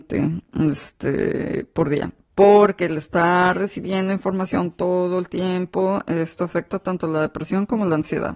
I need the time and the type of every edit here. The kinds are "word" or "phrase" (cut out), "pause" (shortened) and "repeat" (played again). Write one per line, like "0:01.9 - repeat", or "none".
none